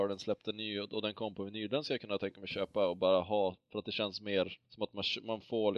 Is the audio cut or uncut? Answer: cut